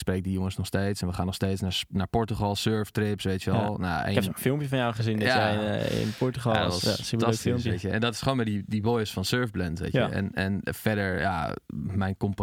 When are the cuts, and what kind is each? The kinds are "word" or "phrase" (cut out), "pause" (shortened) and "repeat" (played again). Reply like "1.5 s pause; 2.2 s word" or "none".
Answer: none